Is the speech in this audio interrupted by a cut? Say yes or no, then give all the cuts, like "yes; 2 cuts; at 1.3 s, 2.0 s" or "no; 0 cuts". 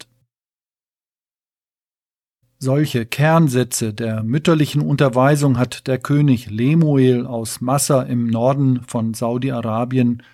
no; 0 cuts